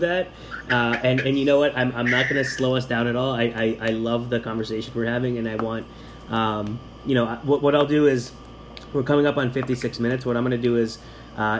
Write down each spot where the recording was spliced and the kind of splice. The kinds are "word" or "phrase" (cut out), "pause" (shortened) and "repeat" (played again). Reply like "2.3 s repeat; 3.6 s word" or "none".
none